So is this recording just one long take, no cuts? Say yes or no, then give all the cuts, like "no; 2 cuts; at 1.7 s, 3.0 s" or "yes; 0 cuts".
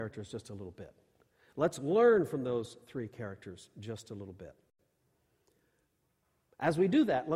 yes; 0 cuts